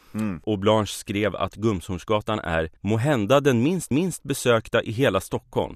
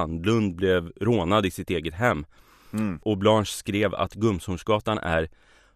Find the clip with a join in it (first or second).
first